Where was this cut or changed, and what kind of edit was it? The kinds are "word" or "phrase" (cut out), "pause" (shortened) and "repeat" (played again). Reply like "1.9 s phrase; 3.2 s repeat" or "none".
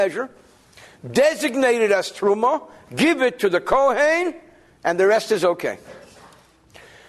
none